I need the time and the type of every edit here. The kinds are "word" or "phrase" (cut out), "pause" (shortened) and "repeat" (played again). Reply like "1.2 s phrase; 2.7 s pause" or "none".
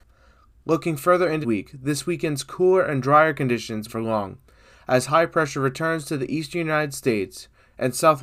1.4 s word; 3.9 s phrase

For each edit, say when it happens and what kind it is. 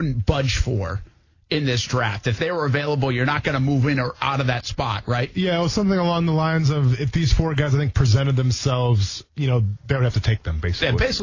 9.2 s word

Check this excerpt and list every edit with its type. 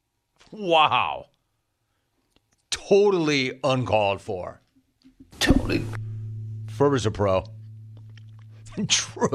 none

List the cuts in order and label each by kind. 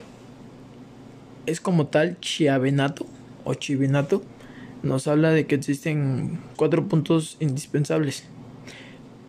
6.5 s word

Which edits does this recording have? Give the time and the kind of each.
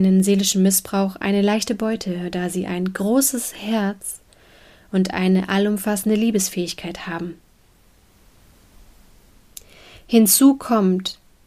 none

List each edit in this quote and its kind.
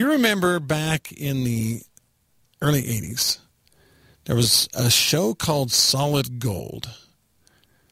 none

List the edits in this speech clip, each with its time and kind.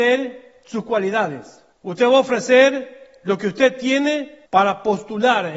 1.7 s pause; 4.5 s pause

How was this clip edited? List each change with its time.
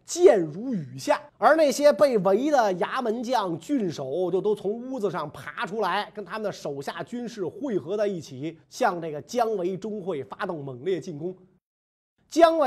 1.3 s pause; 8.6 s pause

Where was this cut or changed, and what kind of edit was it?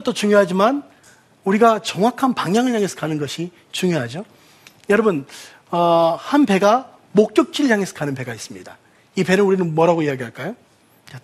none

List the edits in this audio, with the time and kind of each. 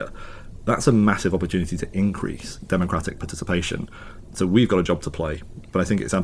none

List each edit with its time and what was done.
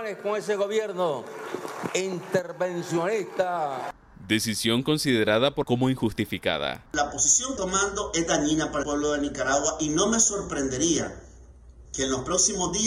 5.6 s phrase; 6.9 s pause; 7.6 s phrase; 8.8 s word; 11.9 s pause

